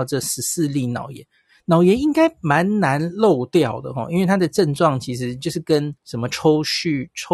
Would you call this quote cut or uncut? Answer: cut